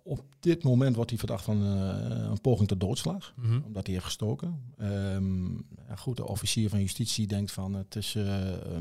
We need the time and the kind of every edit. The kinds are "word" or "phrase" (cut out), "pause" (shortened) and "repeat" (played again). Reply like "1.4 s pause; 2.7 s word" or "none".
6.2 s word